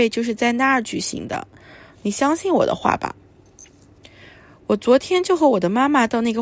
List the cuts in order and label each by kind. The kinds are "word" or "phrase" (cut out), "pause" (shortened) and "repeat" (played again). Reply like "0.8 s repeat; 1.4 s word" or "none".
none